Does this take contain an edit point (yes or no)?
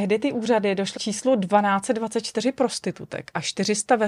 yes